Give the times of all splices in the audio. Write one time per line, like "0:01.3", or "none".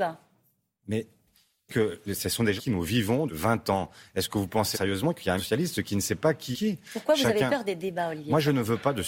0:01.7
0:02.6
0:03.3
0:04.7
0:05.4
0:06.5